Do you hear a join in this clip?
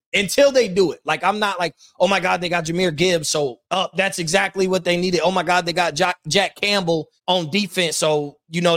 yes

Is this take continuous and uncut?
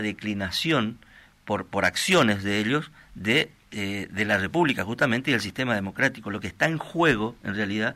yes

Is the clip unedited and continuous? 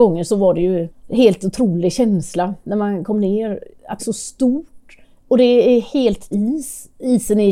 no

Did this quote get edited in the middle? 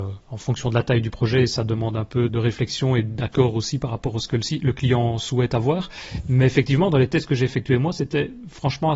yes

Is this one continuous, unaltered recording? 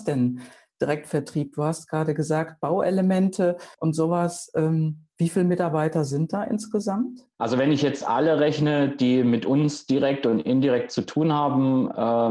no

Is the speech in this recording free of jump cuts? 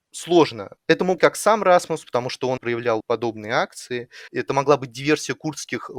no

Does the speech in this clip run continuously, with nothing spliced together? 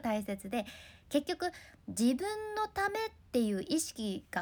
no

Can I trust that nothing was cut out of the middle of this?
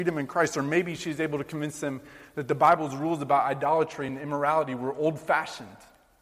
yes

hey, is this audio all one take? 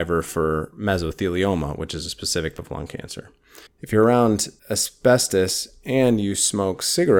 no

